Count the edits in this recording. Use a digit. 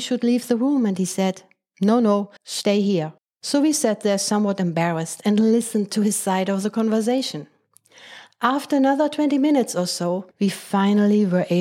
3